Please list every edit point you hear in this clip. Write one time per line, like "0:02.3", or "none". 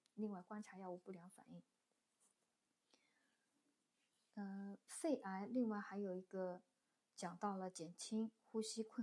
none